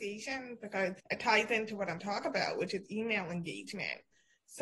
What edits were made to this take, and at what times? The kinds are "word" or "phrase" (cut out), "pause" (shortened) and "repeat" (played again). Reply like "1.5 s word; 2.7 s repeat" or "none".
1.0 s pause; 2.0 s word